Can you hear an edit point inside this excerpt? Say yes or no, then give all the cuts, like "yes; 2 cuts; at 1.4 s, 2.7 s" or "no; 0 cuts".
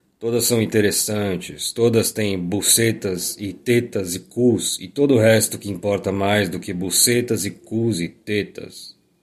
no; 0 cuts